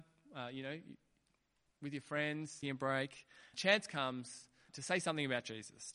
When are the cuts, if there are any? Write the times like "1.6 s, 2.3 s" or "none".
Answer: 2.6 s, 3.5 s, 4.7 s